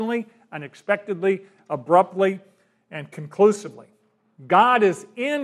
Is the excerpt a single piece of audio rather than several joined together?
yes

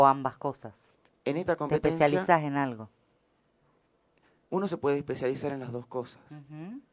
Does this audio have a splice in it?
no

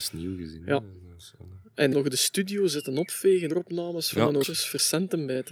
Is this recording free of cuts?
no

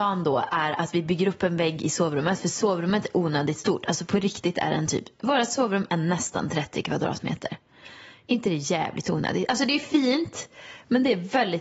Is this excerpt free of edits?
no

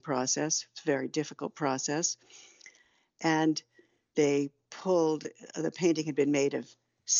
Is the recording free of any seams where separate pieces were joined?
yes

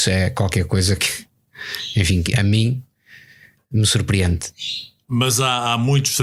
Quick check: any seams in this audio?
no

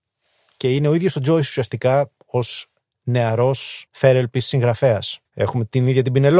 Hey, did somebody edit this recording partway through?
yes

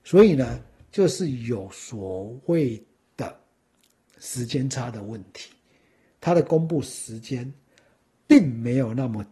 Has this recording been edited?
no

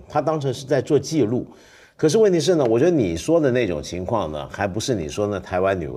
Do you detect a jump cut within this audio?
no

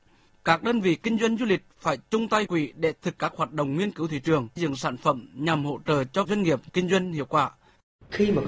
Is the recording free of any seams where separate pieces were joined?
no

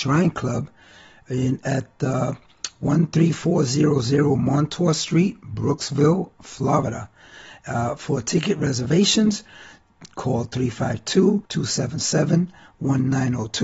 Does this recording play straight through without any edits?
no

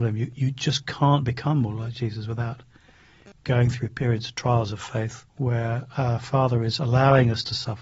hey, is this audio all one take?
no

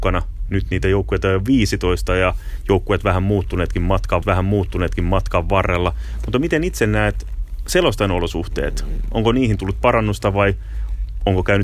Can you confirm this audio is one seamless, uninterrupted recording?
no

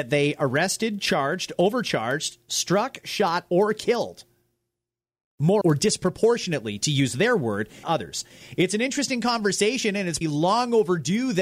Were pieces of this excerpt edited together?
yes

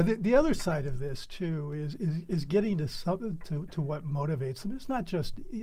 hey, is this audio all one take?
yes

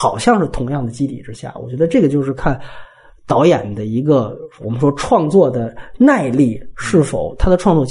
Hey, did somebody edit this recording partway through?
no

